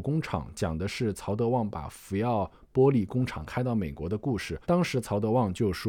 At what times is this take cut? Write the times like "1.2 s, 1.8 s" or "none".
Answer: 4.6 s